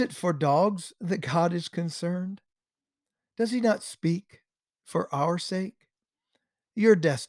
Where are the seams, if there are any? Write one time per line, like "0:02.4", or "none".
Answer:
none